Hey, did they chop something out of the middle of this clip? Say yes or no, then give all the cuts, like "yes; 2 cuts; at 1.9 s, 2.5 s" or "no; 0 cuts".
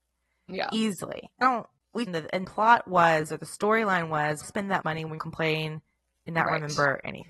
yes; 6 cuts; at 1.4 s, 2.1 s, 2.4 s, 4.4 s, 4.8 s, 5.2 s